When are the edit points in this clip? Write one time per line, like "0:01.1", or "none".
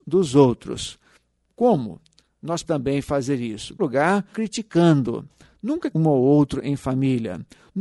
0:02.6
0:03.8
0:04.3
0:05.9